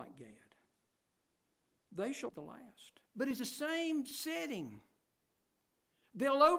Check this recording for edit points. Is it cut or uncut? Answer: cut